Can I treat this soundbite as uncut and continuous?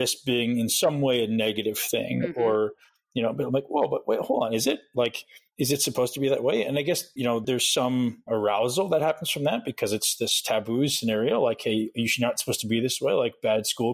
yes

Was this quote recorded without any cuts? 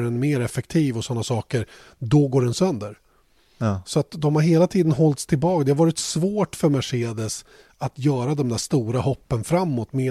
yes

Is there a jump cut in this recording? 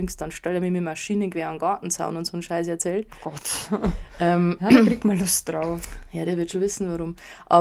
no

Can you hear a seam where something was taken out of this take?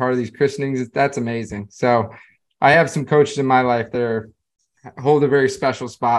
no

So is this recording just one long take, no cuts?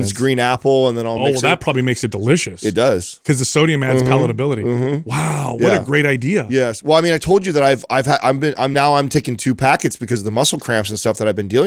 yes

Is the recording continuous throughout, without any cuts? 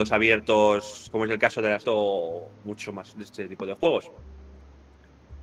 no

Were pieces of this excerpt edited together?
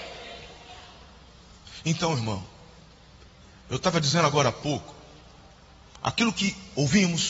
no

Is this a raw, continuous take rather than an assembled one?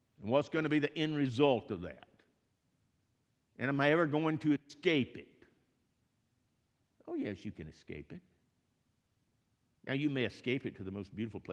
yes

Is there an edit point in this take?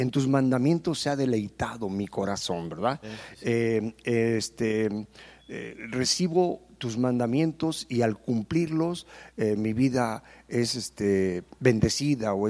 no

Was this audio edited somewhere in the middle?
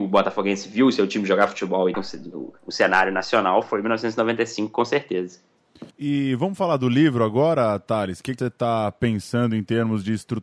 yes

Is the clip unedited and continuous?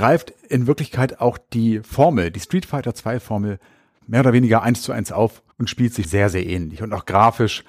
no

